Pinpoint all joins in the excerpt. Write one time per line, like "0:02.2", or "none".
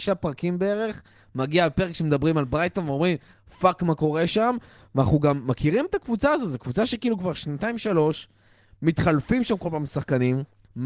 none